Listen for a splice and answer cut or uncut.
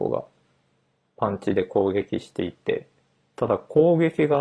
uncut